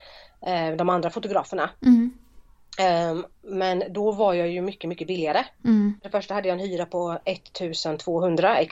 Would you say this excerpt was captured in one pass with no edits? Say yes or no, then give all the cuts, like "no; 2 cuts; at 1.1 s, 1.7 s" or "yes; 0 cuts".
no; 2 cuts; at 3.3 s, 6.0 s